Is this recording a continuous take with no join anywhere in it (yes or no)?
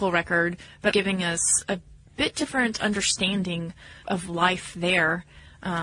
no